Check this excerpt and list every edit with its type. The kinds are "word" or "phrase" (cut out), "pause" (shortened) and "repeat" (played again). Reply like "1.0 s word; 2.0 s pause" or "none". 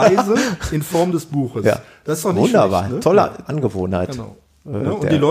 3.5 s word